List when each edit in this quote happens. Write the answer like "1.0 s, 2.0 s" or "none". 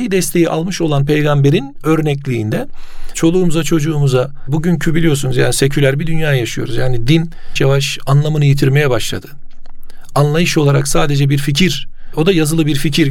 7.6 s